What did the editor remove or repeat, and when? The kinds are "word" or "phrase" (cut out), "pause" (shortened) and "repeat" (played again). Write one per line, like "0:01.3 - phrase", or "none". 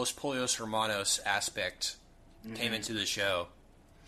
none

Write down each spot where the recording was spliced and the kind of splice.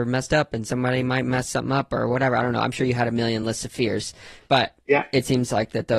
none

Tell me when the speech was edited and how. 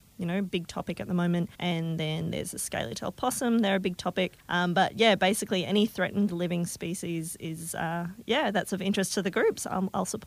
0:01.5 - pause
0:04.4 - pause

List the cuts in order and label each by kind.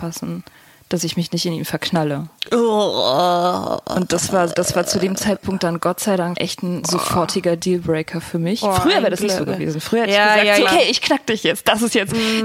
0:04.5 - word
0:06.3 - word
0:06.8 - word
0:10.7 - word

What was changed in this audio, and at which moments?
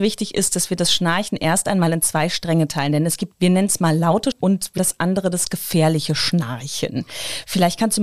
0:03.3 - word
0:04.3 - word
0:04.8 - word

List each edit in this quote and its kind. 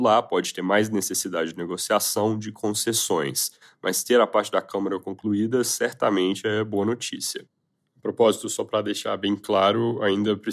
none

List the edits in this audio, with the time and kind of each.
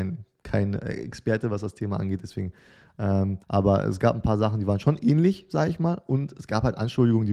0:03.4 - pause

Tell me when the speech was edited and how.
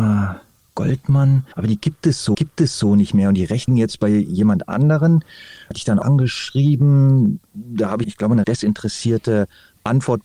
0:01.5 - pause
0:02.3 - repeat
0:03.7 - word
0:05.7 - word
0:06.0 - phrase
0:08.0 - phrase
0:08.4 - word

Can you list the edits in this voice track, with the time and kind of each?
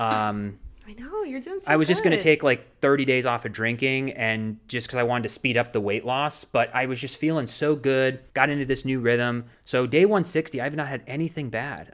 0:08.3 - pause
0:09.5 - pause

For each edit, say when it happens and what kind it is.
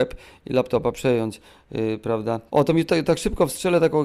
0:02.5 - pause

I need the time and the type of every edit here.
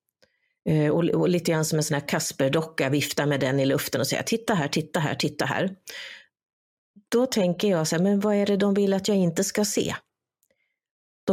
none

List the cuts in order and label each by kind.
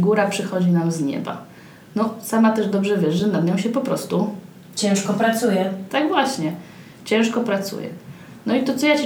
none

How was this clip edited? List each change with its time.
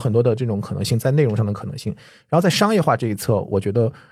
none

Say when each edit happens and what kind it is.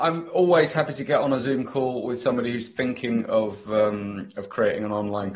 none

